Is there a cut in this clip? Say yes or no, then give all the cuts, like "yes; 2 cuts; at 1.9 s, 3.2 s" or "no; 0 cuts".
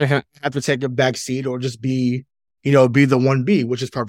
no; 0 cuts